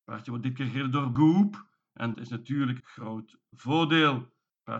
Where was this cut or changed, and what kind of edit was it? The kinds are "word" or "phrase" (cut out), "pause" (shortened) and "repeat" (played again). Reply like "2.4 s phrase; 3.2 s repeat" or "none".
1.1 s word; 2.1 s word; 2.8 s word